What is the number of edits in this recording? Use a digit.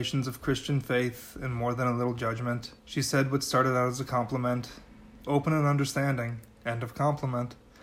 2